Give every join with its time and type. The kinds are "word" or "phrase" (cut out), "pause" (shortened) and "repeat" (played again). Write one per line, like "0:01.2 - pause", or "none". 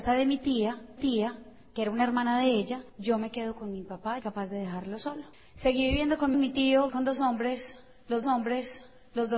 0:01.0 - repeat
0:02.9 - pause
0:04.2 - phrase
0:05.3 - pause
0:06.3 - phrase
0:06.9 - word
0:08.2 - repeat